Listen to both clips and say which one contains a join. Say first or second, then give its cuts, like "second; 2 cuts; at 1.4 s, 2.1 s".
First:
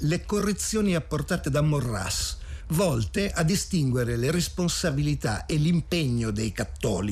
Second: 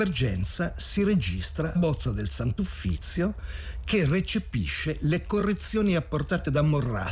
second; 1 cut; at 1.7 s